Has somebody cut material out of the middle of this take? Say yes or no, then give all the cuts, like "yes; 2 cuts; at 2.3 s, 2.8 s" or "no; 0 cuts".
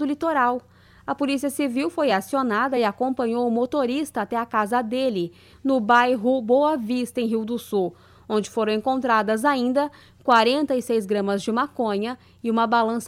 no; 0 cuts